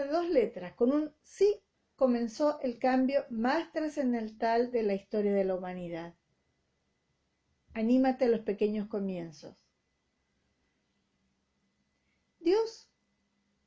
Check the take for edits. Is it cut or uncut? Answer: cut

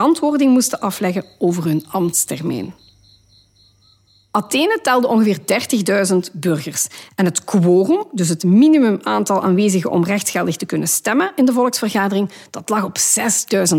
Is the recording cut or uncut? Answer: uncut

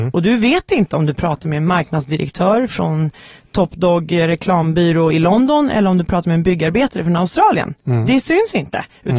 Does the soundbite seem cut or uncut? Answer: uncut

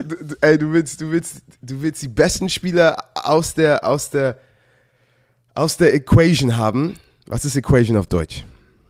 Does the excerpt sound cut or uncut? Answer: uncut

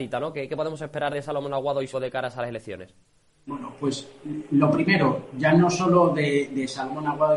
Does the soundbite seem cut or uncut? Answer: cut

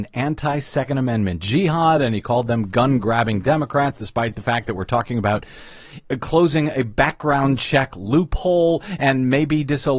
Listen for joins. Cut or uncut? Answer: uncut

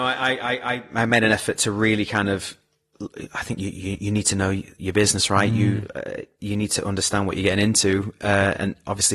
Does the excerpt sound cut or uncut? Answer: uncut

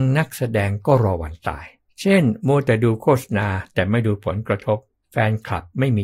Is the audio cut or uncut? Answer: cut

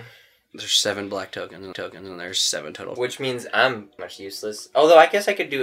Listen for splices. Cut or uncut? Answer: cut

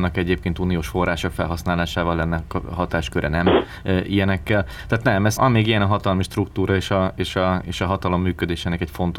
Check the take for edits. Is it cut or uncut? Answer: cut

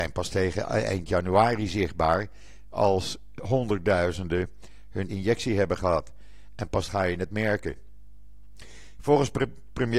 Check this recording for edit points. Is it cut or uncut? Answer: cut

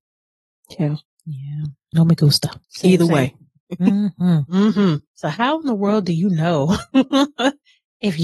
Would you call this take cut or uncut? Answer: cut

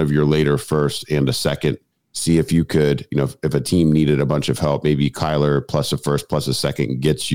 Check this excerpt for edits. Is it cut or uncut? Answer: uncut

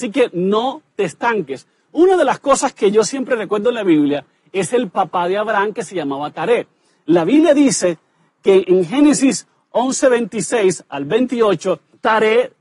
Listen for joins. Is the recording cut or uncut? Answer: uncut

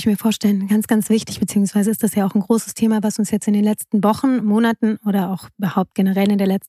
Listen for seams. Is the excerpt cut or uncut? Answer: uncut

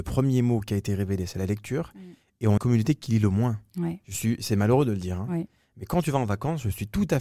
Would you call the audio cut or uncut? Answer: cut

